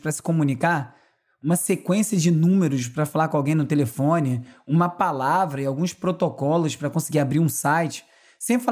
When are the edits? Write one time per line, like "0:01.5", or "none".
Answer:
none

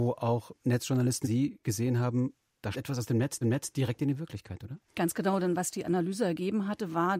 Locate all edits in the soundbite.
0:01.2
0:02.7
0:03.4
0:04.9

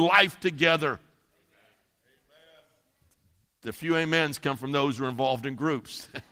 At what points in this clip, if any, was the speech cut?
none

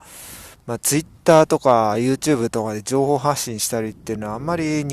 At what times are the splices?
none

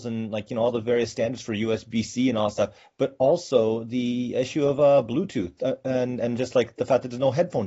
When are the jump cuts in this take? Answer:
none

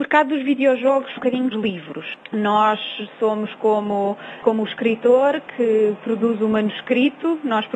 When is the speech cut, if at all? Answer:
0:01.2
0:01.5

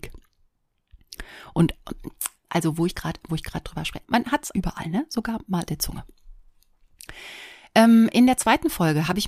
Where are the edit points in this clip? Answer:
0:02.4
0:02.9
0:03.3
0:04.0
0:04.5
0:05.7

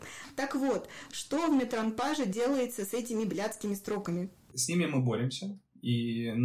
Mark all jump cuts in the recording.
none

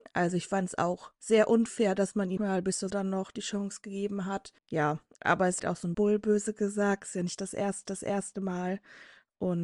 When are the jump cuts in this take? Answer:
0:02.4
0:02.9
0:04.6
0:05.6
0:05.9
0:07.9

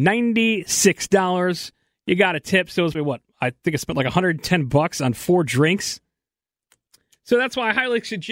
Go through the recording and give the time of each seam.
0:02.9

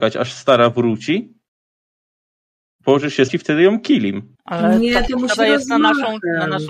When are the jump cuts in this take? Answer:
0:03.3
0:04.3
0:05.4

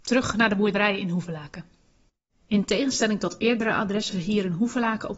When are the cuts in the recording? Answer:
0:04.1

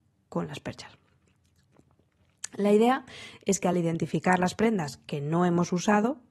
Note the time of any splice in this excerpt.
none

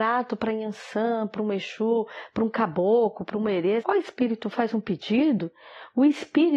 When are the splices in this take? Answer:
0:03.8
0:04.5

